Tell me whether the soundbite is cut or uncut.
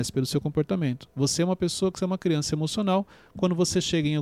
uncut